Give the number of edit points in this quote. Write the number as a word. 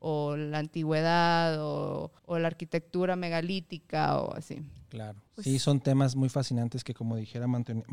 two